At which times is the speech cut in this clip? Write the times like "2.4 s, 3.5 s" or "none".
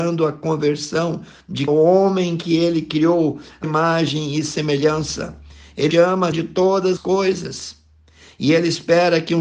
1.7 s, 3.6 s, 5.9 s, 6.3 s, 7.0 s